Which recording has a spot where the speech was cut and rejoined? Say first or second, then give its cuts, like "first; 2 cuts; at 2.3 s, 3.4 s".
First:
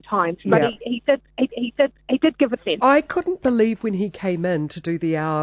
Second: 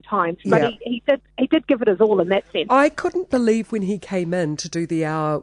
first; 2 cuts; at 1.5 s, 2.6 s